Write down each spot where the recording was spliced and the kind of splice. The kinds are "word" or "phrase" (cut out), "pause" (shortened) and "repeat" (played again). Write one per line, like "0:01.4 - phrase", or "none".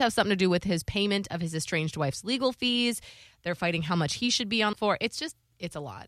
0:04.7 - word